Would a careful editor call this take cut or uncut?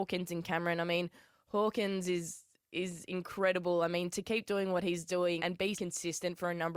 cut